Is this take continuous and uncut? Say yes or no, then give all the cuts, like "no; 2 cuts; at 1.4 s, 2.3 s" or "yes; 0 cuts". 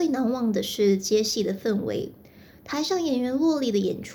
yes; 0 cuts